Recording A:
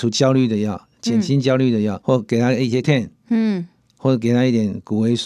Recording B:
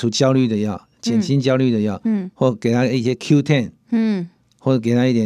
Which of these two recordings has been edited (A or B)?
A